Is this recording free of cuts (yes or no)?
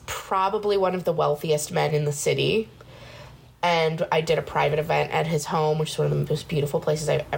yes